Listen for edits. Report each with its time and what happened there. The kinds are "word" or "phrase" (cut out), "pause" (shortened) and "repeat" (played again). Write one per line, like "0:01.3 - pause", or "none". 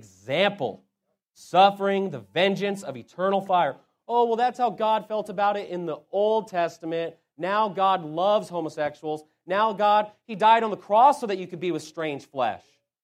none